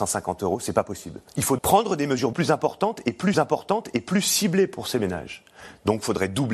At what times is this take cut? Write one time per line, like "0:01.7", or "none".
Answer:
0:01.3
0:01.6
0:02.3
0:03.3